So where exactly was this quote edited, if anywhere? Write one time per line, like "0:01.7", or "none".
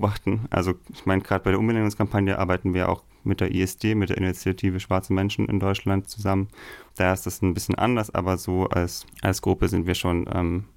0:06.9
0:09.1